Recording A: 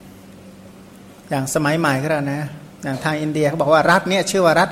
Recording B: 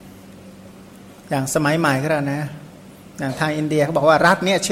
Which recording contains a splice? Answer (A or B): A